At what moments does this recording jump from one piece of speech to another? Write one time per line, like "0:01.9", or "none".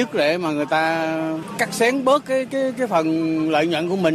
none